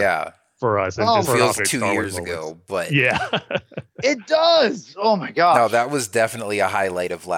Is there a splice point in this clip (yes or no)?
yes